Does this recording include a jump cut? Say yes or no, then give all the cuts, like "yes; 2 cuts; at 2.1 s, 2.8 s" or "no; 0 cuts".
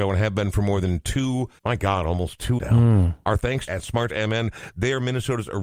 yes; 4 cuts; at 1.6 s, 2.6 s, 3.7 s, 4.1 s